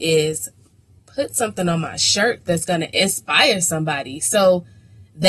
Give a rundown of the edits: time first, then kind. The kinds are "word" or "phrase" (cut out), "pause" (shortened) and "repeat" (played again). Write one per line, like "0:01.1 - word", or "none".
none